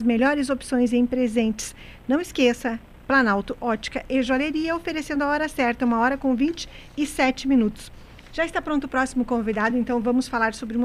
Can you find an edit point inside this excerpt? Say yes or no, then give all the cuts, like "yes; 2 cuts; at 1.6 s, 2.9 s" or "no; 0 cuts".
no; 0 cuts